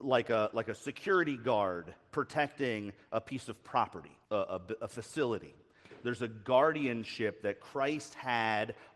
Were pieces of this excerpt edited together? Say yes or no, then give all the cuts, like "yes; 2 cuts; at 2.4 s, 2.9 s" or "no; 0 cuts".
yes; 1 cut; at 4.2 s